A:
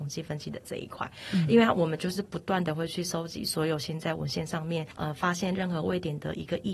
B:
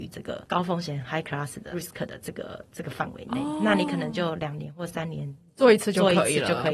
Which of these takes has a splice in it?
B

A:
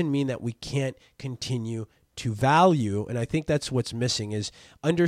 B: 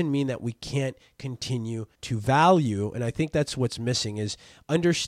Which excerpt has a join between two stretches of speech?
B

